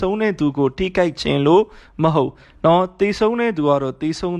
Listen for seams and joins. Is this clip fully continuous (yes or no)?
yes